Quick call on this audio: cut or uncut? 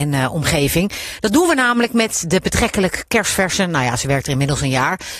uncut